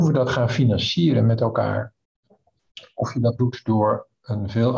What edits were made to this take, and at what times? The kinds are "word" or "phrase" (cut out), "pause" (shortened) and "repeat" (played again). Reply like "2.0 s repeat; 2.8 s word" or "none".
3.4 s word